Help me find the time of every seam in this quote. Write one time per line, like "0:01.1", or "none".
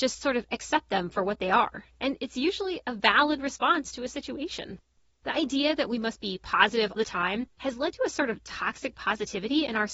0:07.0